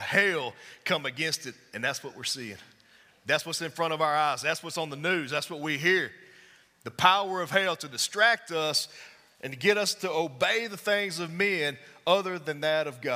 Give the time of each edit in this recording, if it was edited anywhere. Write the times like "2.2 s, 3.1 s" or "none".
none